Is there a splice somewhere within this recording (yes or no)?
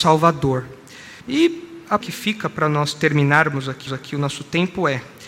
yes